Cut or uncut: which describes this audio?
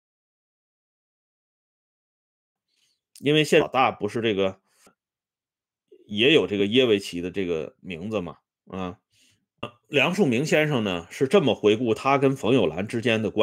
cut